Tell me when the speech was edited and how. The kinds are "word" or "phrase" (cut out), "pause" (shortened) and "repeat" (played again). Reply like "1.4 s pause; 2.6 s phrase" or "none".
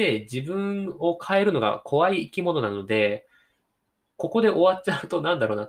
none